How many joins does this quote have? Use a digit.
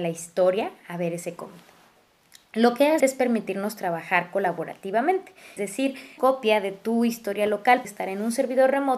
4